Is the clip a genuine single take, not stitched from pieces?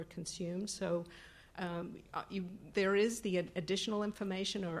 no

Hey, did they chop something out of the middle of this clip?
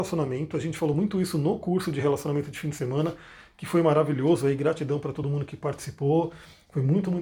no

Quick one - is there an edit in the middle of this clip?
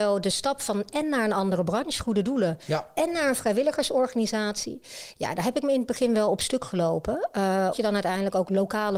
yes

